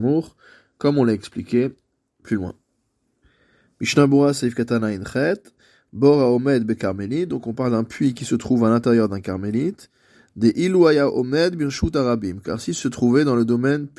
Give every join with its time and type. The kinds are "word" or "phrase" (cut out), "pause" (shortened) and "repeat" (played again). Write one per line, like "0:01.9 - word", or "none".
0:12.8 - word